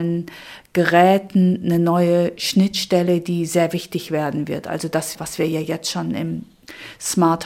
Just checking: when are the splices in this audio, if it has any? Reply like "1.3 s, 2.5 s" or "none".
none